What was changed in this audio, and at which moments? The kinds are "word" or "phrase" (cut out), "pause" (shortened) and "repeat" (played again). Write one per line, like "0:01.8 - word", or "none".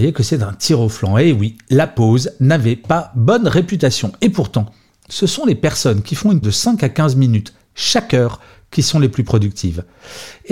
0:06.4 - word